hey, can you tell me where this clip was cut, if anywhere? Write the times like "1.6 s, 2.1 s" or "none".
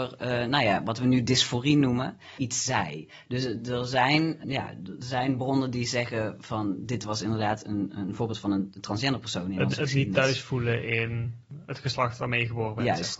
4.4 s